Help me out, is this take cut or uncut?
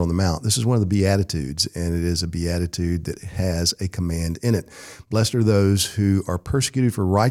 uncut